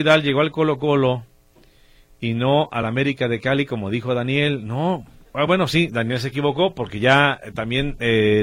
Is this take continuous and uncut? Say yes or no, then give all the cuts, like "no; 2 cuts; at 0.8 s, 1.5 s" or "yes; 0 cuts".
yes; 0 cuts